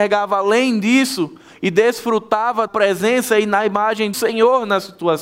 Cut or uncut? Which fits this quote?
cut